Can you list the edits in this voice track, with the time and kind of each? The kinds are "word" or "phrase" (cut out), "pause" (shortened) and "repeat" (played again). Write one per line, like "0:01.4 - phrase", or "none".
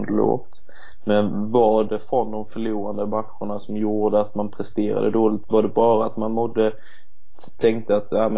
0:01.9 - word